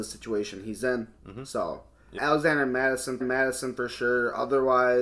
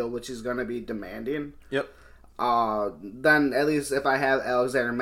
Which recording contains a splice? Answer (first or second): first